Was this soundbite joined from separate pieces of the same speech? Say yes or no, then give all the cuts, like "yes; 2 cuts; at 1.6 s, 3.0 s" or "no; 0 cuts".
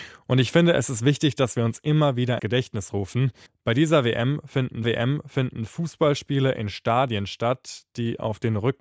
yes; 3 cuts; at 2.4 s, 3.5 s, 4.8 s